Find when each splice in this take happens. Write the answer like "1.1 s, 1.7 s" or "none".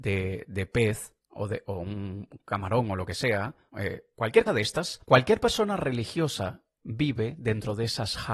1.2 s, 3.7 s, 4.5 s, 5.0 s, 6.8 s